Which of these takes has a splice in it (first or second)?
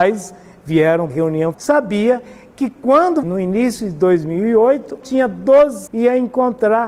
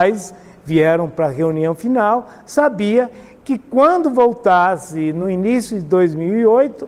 first